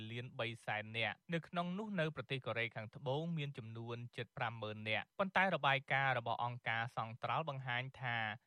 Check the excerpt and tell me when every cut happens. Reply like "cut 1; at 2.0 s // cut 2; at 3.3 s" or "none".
cut 1; at 1.2 s // cut 2; at 5.1 s

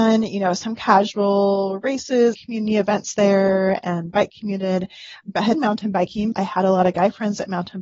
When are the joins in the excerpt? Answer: cut 1; at 2.3 s // cut 2; at 5.2 s // cut 3; at 5.5 s // cut 4; at 6.3 s

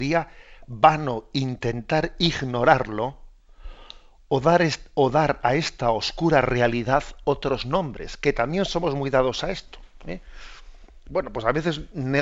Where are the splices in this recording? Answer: none

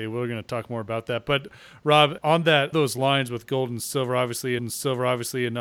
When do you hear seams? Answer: cut 1; at 2.2 s // cut 2; at 2.7 s // cut 3; at 4.6 s

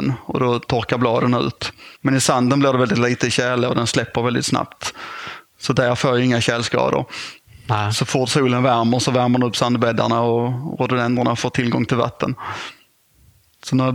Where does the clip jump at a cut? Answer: cut 1; at 2.0 s

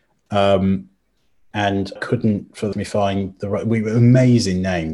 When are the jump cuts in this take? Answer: cut 1; at 2.0 s // cut 2; at 2.7 s

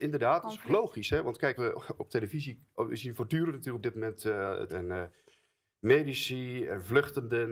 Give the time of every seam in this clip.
cut 1; at 1.6 s // cut 2; at 4.7 s

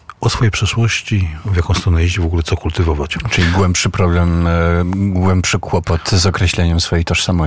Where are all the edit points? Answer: none

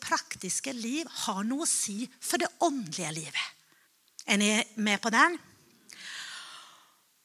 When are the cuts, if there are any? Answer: cut 1; at 3.8 s

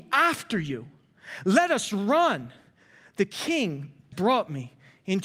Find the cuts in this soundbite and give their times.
cut 1; at 4.1 s

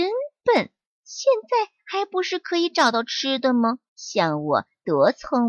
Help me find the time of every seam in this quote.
cut 1; at 3.9 s

